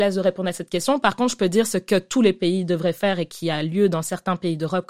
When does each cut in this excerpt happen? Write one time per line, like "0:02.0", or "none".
none